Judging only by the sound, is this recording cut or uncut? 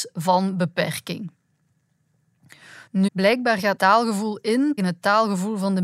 cut